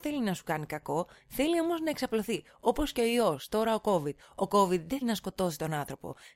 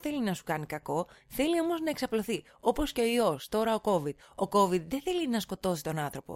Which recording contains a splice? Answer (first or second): first